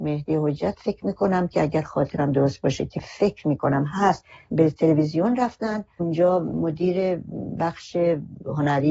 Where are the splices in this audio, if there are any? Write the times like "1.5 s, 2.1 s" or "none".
none